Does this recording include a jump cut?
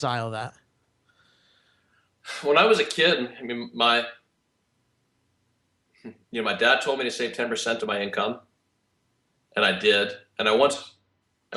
no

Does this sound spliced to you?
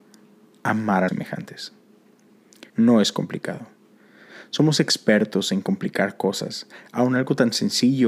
yes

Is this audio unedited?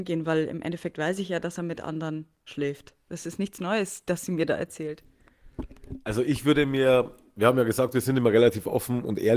yes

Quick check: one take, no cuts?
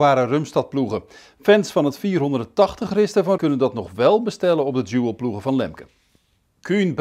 no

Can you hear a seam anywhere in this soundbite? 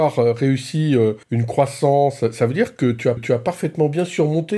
yes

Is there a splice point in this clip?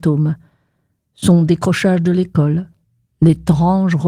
no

